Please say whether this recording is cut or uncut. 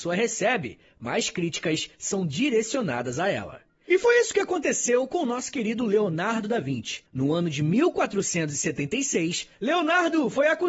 cut